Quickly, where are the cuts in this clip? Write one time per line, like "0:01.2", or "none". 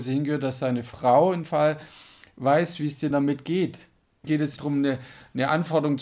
0:01.4
0:03.1
0:04.2
0:04.6